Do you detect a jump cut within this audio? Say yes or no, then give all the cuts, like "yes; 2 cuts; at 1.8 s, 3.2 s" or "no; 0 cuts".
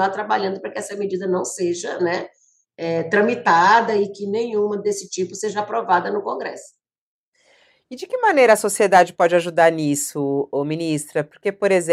no; 0 cuts